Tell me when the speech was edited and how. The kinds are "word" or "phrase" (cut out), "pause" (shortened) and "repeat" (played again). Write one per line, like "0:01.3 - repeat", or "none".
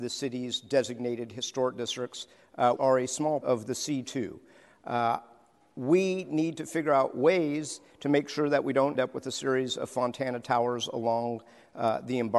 0:02.8 - word
0:03.4 - word
0:09.0 - word